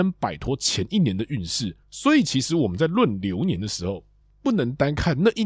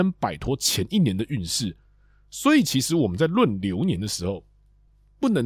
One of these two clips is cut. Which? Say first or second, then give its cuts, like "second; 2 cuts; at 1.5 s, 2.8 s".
first; 2 cuts; at 1.8 s, 4.2 s